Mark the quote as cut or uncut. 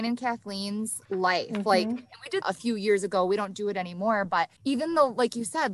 cut